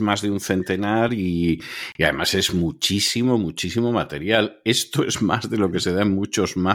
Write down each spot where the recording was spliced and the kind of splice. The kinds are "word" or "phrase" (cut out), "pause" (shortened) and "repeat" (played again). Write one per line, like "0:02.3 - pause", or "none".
none